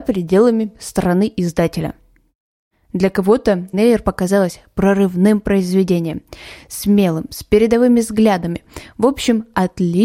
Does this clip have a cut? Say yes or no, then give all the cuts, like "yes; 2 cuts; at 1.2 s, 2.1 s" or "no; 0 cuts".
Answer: yes; 1 cut; at 3.7 s